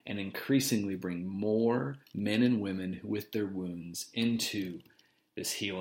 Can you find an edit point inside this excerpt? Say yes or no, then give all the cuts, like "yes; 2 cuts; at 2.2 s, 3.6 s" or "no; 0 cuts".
yes; 1 cut; at 2.0 s